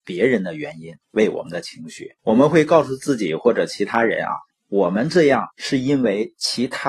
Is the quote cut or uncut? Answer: cut